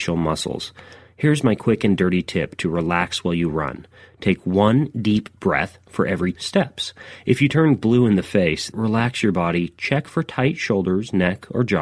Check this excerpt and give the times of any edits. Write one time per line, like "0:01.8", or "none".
0:06.3
0:08.7